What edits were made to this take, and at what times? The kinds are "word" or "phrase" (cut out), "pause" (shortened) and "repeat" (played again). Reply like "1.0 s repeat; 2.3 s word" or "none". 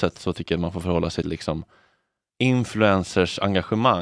1.2 s word